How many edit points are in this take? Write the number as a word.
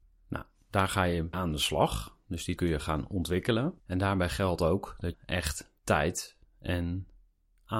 five